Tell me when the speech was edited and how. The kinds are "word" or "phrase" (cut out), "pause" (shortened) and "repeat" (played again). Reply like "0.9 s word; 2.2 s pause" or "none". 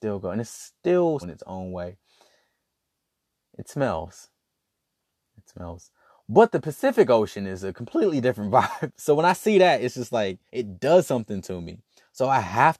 1.2 s phrase; 10.5 s pause